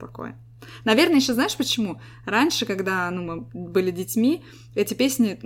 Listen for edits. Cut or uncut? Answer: uncut